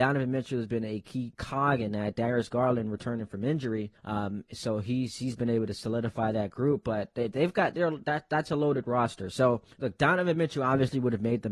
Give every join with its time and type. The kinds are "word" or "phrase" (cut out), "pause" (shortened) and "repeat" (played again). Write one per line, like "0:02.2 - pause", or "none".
0:03.9 - pause
0:09.7 - pause